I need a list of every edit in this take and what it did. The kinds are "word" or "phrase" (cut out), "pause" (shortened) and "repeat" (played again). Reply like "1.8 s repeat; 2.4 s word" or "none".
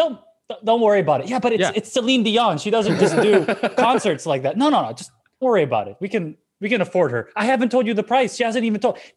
5.4 s word